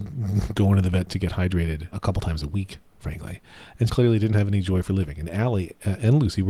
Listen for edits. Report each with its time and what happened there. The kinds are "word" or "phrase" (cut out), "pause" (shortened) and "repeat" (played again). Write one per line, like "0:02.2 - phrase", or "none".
0:01.9 - word
0:03.9 - word